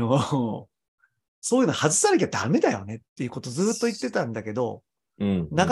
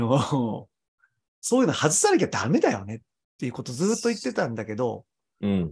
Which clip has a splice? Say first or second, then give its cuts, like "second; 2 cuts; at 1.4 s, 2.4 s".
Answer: first; 1 cut; at 3.1 s